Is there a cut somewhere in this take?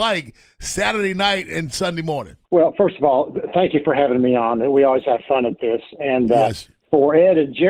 yes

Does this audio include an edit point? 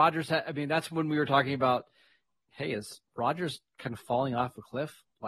no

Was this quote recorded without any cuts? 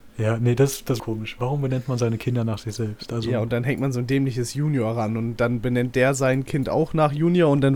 no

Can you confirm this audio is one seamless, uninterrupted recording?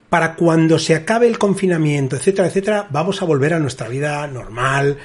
yes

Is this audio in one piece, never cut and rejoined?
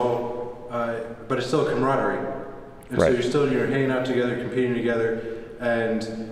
yes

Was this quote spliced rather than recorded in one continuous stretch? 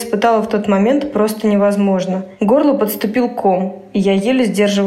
no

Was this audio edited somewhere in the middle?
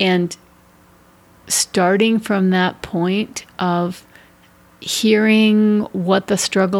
no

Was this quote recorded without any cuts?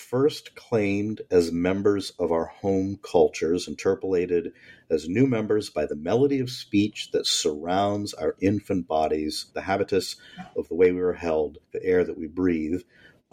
no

